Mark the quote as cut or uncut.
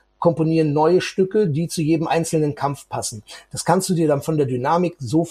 uncut